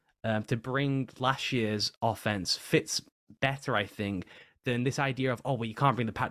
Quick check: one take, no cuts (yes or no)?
yes